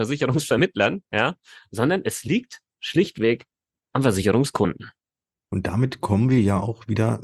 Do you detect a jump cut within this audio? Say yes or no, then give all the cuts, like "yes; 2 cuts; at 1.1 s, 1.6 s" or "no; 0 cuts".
no; 0 cuts